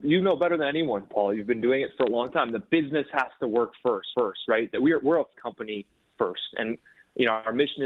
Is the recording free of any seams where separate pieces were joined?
no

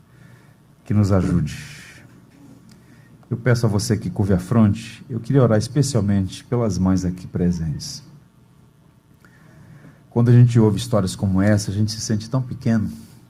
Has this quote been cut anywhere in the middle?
no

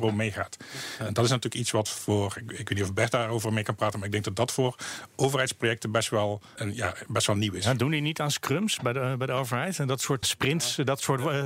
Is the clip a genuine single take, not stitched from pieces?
no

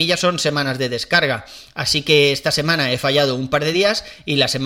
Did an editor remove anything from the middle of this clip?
no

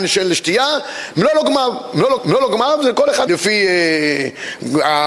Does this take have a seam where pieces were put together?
yes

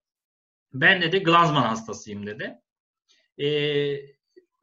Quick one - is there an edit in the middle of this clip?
no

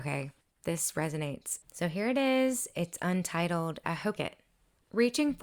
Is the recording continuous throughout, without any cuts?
no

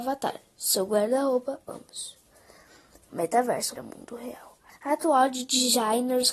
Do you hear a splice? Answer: yes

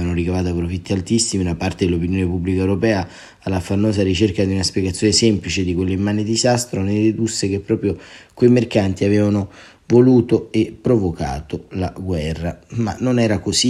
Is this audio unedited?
yes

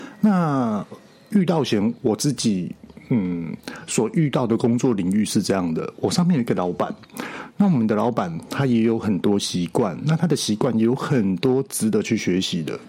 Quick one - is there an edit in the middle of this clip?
no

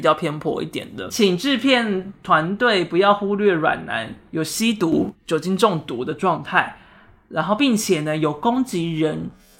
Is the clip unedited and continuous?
no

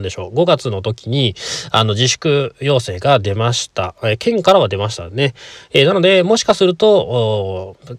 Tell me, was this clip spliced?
no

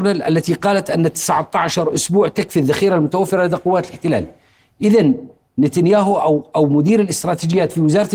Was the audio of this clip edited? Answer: no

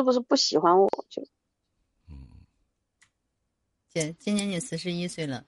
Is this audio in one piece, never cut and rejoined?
yes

